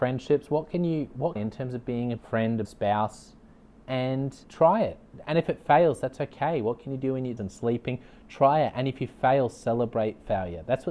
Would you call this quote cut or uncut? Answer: cut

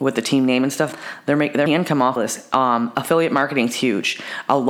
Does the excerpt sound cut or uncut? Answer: cut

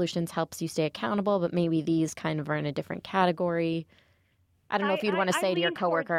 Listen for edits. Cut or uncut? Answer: uncut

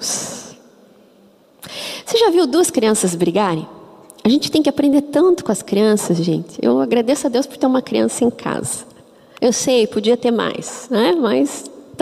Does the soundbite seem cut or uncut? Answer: uncut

